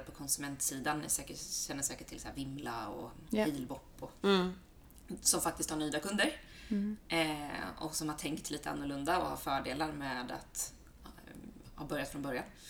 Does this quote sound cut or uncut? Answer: uncut